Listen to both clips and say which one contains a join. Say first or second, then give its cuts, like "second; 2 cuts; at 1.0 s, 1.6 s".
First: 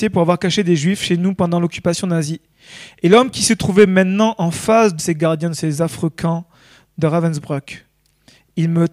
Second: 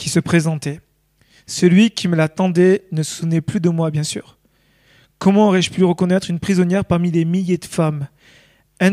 first; 1 cut; at 5.0 s